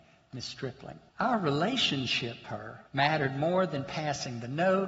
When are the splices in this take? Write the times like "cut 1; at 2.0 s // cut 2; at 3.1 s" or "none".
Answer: cut 1; at 1.1 s // cut 2; at 2.4 s // cut 3; at 2.9 s